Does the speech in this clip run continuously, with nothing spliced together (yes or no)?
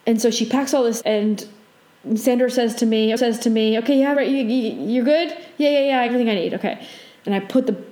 no